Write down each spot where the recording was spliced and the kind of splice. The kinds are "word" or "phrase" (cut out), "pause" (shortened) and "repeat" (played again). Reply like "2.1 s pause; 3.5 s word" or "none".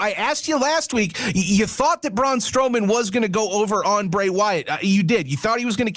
none